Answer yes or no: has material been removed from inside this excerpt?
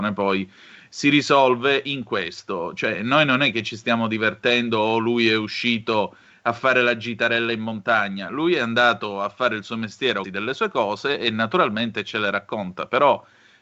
yes